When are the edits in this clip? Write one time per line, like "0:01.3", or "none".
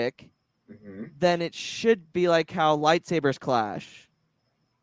0:02.1